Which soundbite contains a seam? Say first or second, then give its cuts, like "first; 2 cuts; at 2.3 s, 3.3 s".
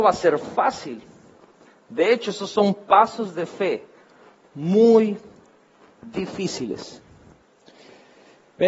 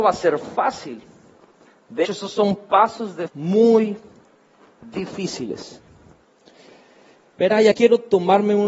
second; 3 cuts; at 2.0 s, 3.3 s, 7.7 s